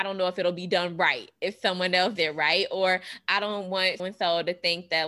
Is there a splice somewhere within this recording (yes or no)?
yes